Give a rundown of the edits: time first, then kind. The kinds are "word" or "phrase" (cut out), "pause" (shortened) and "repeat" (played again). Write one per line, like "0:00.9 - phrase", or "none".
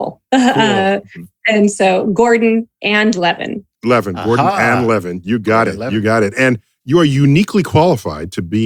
none

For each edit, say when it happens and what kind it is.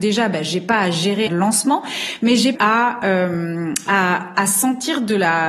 0:01.3 - phrase
0:02.5 - phrase

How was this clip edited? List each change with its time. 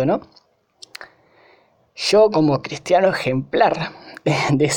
none

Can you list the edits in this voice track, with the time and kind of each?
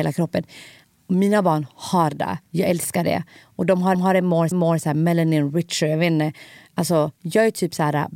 0:02.4 - pause
0:03.9 - repeat
0:04.5 - repeat
0:07.1 - pause

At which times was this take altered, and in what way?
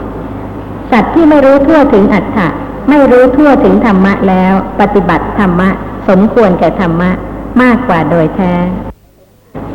none

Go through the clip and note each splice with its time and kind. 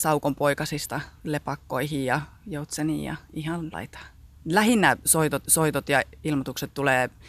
0:03.7 - word
0:04.2 - pause
0:05.4 - repeat

